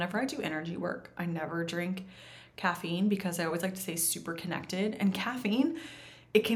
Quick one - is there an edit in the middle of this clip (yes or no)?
no